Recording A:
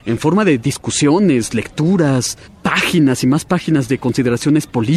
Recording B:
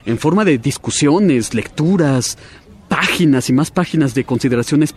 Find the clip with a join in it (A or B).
A